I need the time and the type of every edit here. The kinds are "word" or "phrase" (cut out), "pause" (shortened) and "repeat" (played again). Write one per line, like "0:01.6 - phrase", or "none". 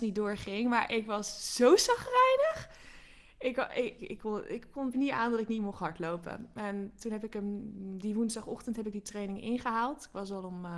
0:04.0 - word
0:04.9 - word